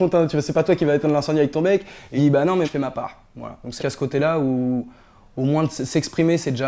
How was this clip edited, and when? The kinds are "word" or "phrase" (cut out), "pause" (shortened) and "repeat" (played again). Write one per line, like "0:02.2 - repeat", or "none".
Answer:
0:02.2 - word
0:02.6 - word
0:03.8 - word